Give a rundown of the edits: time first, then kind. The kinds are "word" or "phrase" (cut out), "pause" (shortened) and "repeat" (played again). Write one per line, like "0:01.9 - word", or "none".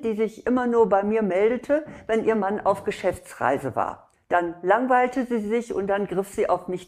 none